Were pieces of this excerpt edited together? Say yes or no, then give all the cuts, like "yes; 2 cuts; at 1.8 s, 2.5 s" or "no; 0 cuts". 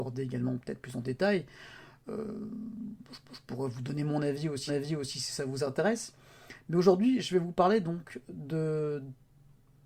yes; 2 cuts; at 3.2 s, 4.7 s